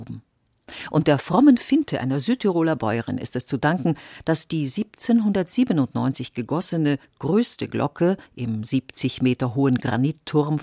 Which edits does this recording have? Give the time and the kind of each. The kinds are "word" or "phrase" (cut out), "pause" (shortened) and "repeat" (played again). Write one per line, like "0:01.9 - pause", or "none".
none